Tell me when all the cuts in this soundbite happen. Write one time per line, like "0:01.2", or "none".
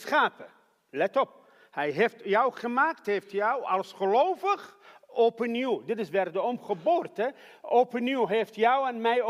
none